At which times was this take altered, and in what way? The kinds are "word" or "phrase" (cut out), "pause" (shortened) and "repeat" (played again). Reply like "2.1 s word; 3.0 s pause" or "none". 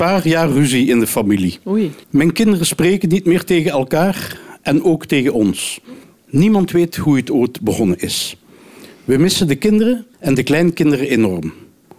2.0 s pause; 6.0 s pause; 10.1 s pause